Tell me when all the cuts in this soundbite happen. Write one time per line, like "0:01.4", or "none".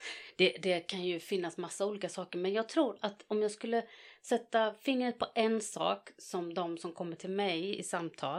none